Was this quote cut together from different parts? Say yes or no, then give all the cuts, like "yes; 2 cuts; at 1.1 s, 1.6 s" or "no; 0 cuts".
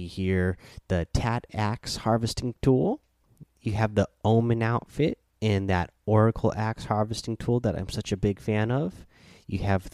yes; 1 cut; at 5.3 s